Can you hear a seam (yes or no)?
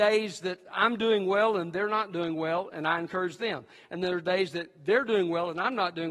no